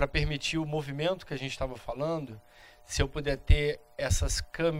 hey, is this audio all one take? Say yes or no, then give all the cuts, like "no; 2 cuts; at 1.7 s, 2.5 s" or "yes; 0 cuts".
yes; 0 cuts